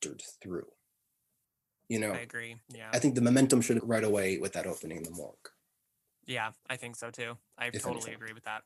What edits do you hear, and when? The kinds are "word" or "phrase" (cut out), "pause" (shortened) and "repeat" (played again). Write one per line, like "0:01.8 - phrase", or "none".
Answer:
0:02.6 - pause
0:03.8 - phrase
0:06.6 - pause